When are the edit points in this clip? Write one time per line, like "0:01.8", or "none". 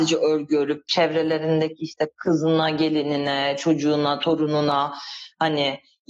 none

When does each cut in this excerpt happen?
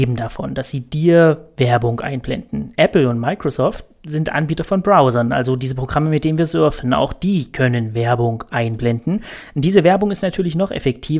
none

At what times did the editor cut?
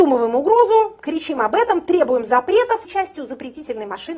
0:02.8

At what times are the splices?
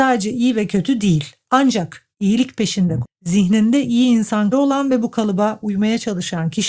0:02.1
0:03.0
0:04.5

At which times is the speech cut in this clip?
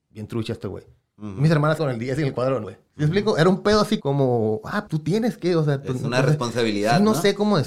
0:01.8
0:02.6
0:04.0
0:04.9

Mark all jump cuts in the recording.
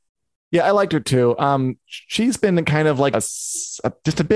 0:03.1

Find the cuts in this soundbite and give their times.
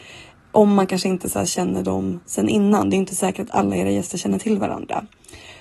0:02.2

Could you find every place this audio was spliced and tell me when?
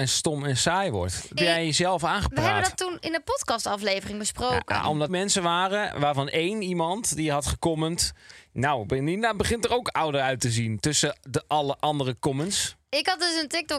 0:01.4
0:05.1

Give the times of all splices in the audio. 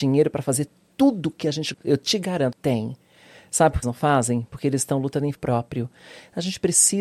0:01.7
0:02.5
0:03.8
0:05.3

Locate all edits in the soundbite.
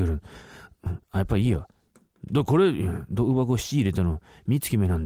0:01.0

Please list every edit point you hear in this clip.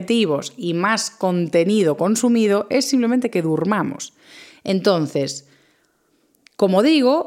none

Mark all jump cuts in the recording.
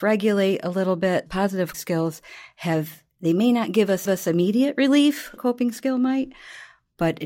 0:01.3
0:01.7
0:04.0
0:05.4

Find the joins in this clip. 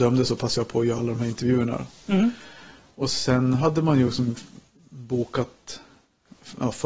none

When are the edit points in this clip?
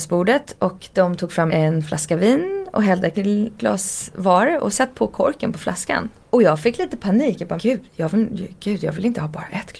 0:01.5
0:03.1
0:03.6
0:06.2
0:07.6
0:07.9

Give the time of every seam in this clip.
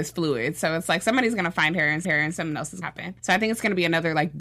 0:02.0
0:02.8
0:03.2

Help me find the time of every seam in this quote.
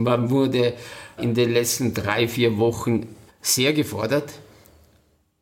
0:01.2
0:03.3

